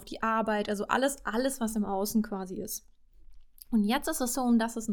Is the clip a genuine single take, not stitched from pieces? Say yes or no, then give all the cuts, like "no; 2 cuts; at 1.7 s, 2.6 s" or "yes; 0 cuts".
yes; 0 cuts